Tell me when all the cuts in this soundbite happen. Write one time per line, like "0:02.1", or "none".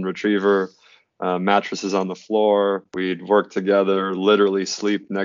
0:02.9